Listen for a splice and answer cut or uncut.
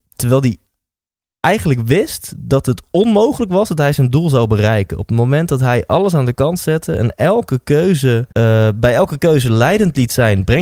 cut